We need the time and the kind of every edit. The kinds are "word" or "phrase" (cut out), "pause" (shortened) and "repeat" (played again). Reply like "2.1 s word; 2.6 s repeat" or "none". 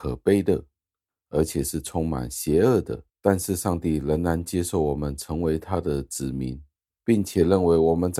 3.1 s pause; 6.8 s pause

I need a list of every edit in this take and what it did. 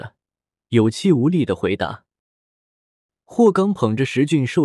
none

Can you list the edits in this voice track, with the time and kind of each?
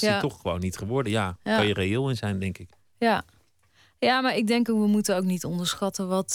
none

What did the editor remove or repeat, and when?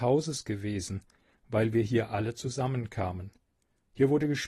none

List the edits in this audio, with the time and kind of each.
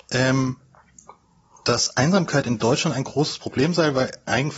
none

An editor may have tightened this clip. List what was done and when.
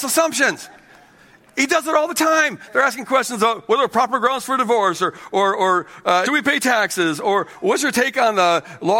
6.3 s phrase

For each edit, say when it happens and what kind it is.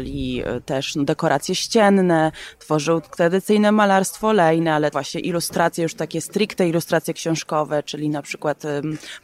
4.9 s word

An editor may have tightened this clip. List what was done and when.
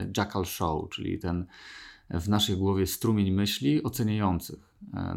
none

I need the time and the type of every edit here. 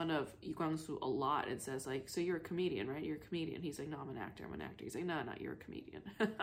none

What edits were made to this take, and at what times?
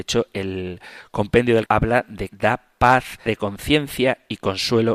1.7 s word; 2.3 s word; 3.3 s word

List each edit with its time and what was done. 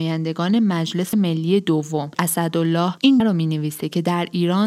1.1 s word; 2.2 s word; 3.2 s word

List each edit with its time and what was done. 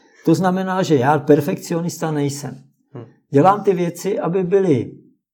none

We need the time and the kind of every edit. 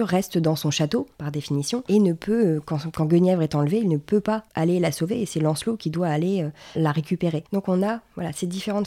1.1 s pause; 4.5 s pause; 7.5 s pause

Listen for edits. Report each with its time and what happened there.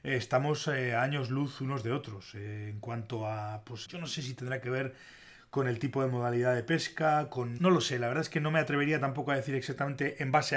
3.9 s word; 7.6 s word

